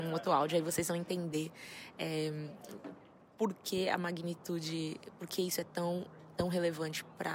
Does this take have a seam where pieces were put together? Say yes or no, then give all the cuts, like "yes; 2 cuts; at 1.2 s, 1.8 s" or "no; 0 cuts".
no; 0 cuts